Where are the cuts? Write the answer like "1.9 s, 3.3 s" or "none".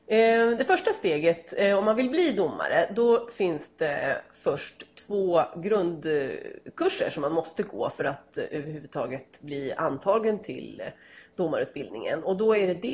none